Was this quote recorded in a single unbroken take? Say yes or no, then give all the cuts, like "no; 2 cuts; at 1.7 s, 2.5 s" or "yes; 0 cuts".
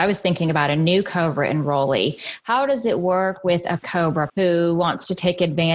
no; 2 cuts; at 3.8 s, 4.3 s